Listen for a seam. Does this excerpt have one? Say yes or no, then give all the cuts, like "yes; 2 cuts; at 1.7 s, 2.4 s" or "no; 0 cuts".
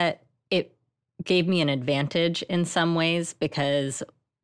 no; 0 cuts